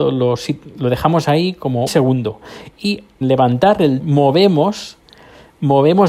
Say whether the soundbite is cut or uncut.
cut